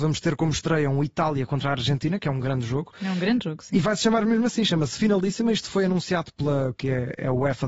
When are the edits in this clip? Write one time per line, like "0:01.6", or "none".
0:06.7